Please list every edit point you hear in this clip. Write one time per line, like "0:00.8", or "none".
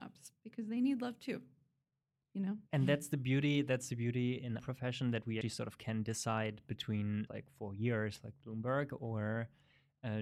0:02.7
0:04.6
0:05.4
0:07.3